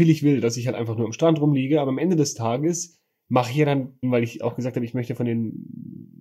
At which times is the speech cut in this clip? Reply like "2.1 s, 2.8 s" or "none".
4.0 s